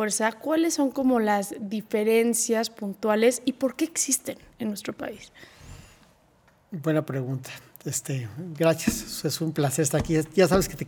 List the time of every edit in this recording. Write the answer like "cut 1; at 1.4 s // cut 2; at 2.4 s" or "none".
none